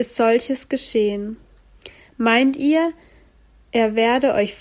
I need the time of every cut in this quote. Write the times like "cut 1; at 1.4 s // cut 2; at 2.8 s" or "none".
none